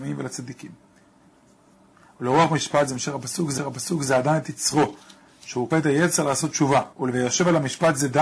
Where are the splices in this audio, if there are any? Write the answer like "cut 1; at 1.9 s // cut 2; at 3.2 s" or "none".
cut 1; at 3.6 s // cut 2; at 5.7 s // cut 3; at 6.9 s